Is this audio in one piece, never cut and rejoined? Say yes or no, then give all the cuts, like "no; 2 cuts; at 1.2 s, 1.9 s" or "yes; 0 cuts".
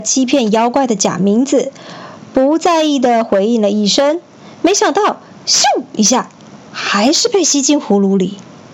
yes; 0 cuts